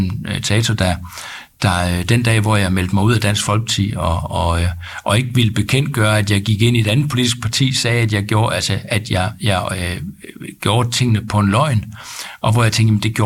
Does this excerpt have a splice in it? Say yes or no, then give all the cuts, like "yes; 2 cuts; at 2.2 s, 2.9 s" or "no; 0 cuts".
no; 0 cuts